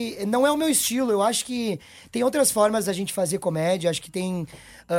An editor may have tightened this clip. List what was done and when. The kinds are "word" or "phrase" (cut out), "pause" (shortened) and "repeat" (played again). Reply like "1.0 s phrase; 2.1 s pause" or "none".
none

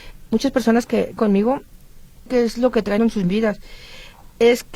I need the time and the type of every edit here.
1.2 s phrase; 2.3 s phrase; 3.0 s word

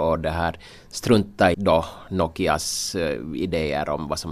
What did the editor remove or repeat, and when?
1.5 s word

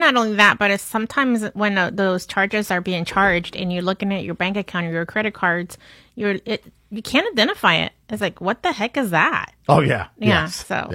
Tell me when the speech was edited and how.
none

